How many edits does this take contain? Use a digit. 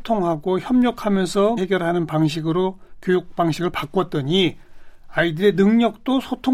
1